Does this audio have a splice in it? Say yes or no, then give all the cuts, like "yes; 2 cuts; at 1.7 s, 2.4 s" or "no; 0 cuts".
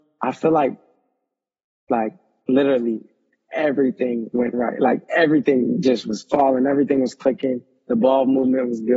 no; 0 cuts